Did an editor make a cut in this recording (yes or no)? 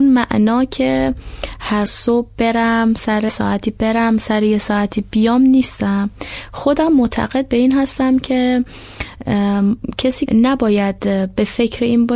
yes